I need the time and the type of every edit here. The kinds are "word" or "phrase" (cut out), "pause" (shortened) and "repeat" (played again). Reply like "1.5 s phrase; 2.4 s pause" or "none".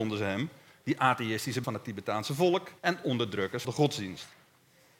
1.6 s word; 2.8 s pause; 3.6 s phrase